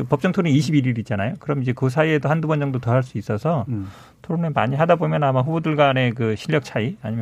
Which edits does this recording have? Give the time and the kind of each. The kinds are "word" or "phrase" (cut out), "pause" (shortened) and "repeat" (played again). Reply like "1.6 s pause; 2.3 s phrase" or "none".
none